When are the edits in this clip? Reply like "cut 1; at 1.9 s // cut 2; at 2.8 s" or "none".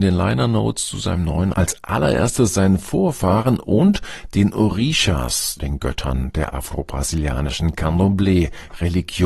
cut 1; at 1.5 s // cut 2; at 5.6 s